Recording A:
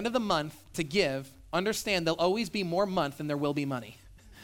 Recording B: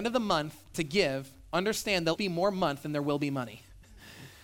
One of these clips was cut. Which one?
B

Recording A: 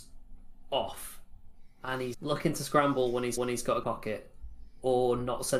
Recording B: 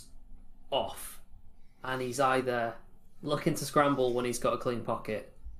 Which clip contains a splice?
A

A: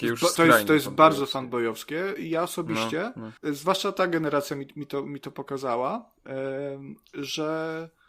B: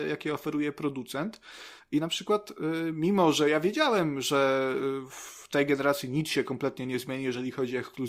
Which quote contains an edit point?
A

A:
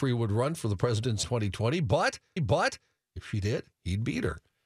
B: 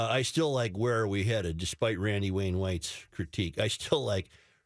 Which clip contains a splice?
A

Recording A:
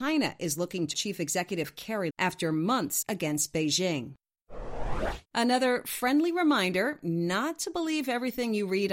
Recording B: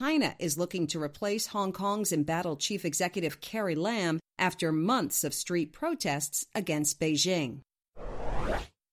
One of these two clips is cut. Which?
A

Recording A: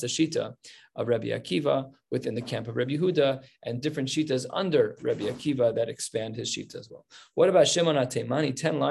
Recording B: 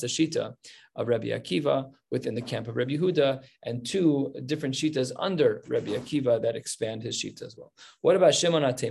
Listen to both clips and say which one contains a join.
A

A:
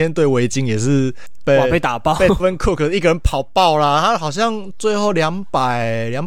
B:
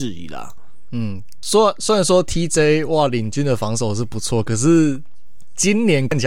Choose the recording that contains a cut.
A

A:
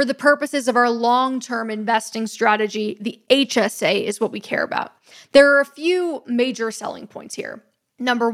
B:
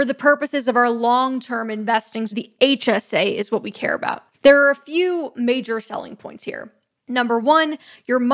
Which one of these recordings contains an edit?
B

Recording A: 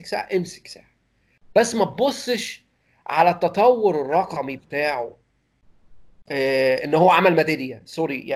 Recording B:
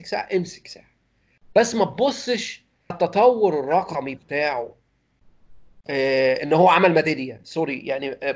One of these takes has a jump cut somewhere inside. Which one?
B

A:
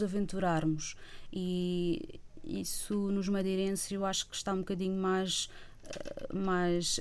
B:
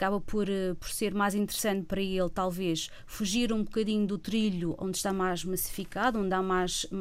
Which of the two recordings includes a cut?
B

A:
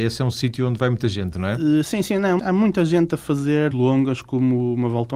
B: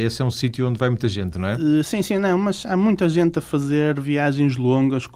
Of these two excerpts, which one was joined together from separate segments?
A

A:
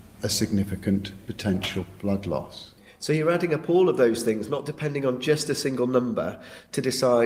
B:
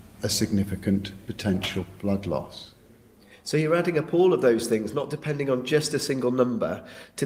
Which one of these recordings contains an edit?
A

